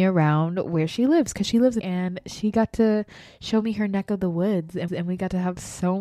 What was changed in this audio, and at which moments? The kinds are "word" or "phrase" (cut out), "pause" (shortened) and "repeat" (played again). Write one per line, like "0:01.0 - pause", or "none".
0:01.8 - word
0:04.9 - repeat